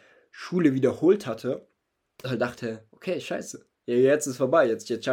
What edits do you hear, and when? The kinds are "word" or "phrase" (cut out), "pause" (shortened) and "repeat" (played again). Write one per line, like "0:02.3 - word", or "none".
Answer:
0:02.2 - word